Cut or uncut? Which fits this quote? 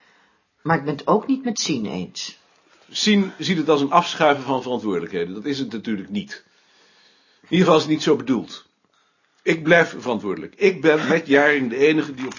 uncut